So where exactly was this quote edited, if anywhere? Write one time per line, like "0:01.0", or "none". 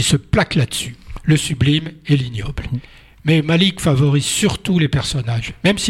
none